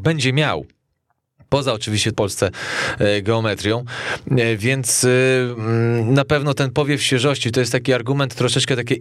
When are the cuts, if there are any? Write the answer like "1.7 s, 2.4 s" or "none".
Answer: 2.1 s